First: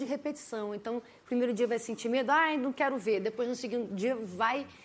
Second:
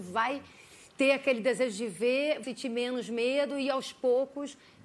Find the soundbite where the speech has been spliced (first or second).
second